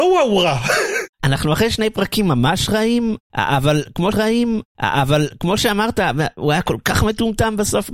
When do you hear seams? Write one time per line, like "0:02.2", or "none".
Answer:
0:04.1